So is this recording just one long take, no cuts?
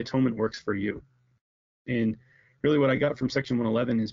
yes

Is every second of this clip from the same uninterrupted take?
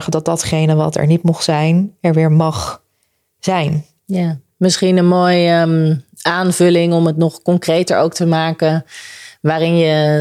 yes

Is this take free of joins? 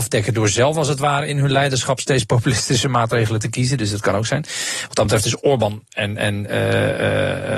yes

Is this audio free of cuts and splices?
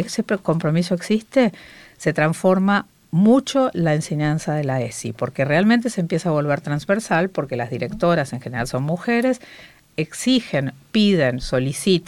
yes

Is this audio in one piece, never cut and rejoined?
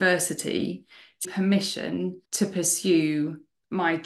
no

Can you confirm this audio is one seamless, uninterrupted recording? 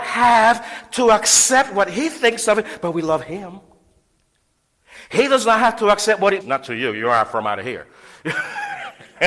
no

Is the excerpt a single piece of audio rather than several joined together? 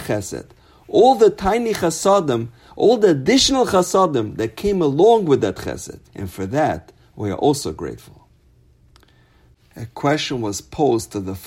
no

